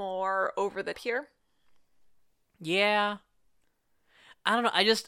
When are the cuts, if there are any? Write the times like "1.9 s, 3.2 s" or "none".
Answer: 0.9 s